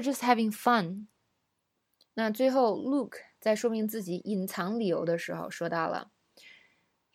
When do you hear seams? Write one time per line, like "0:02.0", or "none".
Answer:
none